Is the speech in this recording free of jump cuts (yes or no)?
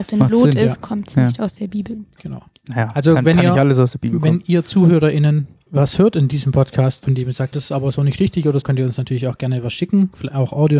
no